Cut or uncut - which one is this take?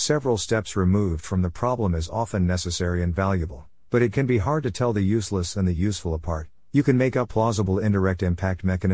uncut